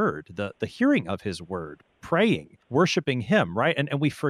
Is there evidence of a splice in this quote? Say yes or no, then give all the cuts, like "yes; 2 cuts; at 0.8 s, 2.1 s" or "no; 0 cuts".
yes; 1 cut; at 2.6 s